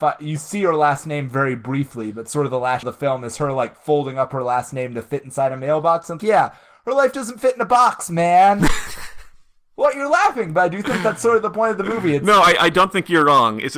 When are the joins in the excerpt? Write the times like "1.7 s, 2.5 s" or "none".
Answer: 2.8 s, 6.2 s